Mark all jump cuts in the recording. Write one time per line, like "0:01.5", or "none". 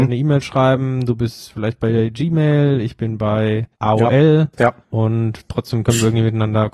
0:03.7
0:04.8